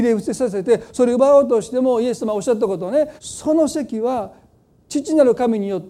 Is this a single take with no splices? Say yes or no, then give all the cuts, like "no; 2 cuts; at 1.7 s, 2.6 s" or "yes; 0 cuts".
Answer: no; 1 cut; at 3.2 s